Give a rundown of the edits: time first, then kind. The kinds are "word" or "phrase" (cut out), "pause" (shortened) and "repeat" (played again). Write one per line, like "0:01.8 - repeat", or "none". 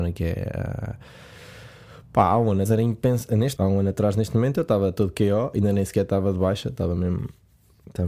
0:02.7 - word
0:03.6 - word